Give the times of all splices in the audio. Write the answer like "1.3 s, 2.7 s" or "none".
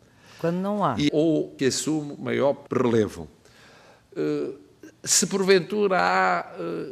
1.1 s, 1.6 s, 2.7 s